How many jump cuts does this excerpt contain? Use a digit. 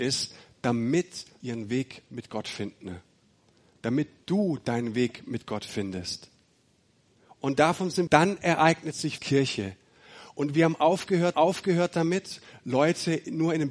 4